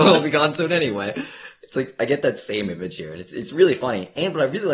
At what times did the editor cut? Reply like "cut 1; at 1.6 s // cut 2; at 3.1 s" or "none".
none